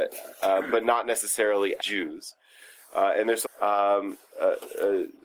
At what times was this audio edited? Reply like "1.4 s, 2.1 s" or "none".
1.8 s, 3.4 s